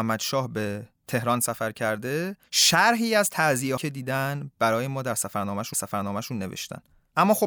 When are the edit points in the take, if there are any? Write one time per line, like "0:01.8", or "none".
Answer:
0:01.0
0:02.5
0:03.8
0:05.7